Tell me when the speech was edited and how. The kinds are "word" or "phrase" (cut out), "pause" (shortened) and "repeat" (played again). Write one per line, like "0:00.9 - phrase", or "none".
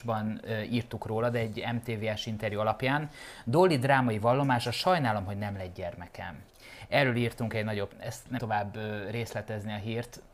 0:07.9 - word
0:08.4 - phrase

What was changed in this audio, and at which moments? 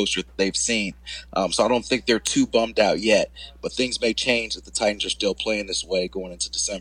none

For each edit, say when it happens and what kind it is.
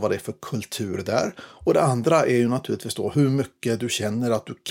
none

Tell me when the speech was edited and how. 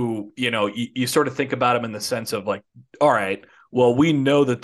none

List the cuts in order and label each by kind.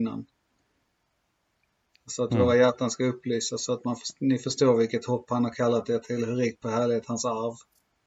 none

